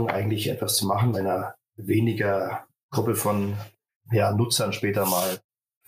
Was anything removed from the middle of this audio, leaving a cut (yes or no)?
yes